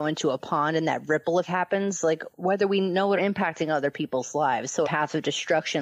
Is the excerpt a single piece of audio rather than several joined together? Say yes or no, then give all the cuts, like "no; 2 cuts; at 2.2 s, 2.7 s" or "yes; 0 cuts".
no; 4 cuts; at 1.4 s, 2.3 s, 3.2 s, 4.8 s